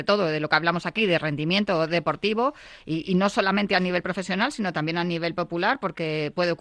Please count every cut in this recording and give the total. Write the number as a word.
zero